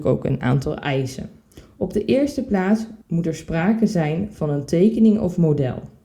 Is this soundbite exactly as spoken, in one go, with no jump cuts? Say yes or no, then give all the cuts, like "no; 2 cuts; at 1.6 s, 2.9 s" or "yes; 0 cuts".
no; 1 cut; at 3.0 s